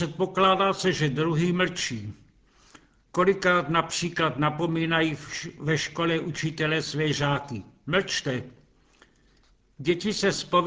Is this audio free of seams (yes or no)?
yes